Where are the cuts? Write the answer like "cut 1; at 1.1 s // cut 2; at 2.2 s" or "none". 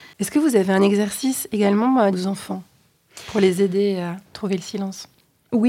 cut 1; at 2.1 s // cut 2; at 4.2 s

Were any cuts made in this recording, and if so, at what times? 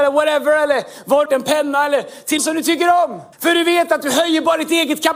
cut 1; at 1.3 s // cut 2; at 2.4 s // cut 3; at 3.3 s

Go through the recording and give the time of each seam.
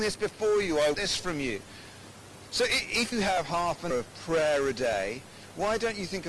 cut 1; at 0.9 s // cut 2; at 3.1 s // cut 3; at 3.9 s

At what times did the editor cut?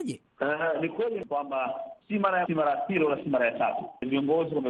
cut 1; at 2.0 s // cut 2; at 2.5 s

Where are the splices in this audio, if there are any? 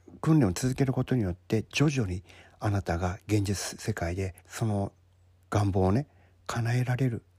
cut 1; at 4.4 s // cut 2; at 5.3 s

